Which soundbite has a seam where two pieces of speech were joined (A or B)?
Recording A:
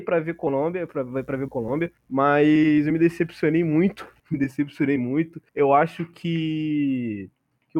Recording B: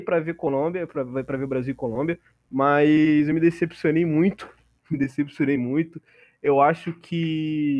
A